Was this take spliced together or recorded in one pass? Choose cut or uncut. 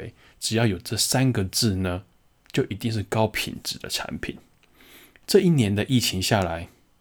uncut